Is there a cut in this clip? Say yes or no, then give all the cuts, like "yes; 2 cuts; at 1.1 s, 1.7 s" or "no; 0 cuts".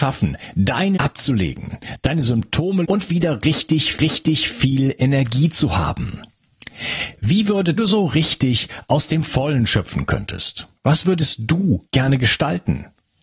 yes; 6 cuts; at 1.0 s, 2.8 s, 4.0 s, 7.8 s, 10.8 s, 11.9 s